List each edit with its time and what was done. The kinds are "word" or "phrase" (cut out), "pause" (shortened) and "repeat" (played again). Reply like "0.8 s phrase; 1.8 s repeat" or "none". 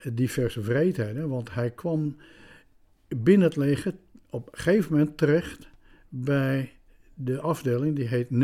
none